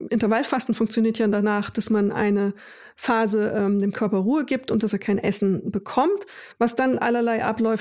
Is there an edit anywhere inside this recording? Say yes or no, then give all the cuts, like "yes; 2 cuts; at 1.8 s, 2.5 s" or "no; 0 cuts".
no; 0 cuts